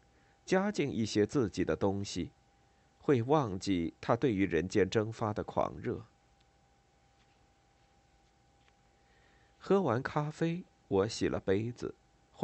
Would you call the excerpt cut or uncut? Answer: uncut